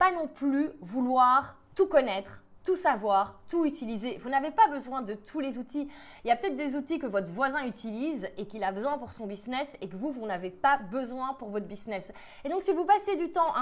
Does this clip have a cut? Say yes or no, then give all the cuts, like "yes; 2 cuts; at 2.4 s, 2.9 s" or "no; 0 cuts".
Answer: no; 0 cuts